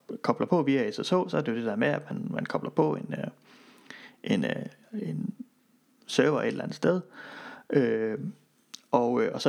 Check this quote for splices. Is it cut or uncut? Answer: uncut